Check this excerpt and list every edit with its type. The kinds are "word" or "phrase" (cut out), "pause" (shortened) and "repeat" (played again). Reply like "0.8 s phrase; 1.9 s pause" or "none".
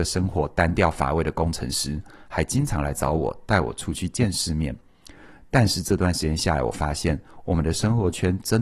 none